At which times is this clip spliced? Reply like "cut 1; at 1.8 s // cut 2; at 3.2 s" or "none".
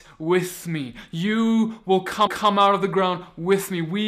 cut 1; at 2.3 s